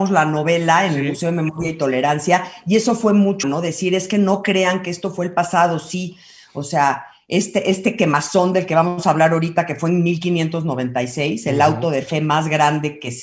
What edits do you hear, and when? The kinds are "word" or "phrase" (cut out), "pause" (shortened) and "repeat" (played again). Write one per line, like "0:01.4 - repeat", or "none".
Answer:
0:03.4 - phrase

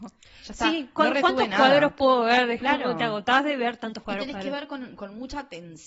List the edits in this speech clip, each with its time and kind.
0:04.0 - word

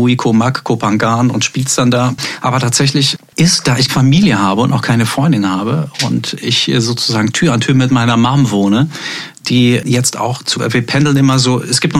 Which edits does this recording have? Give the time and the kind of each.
0:03.9 - word
0:10.5 - word

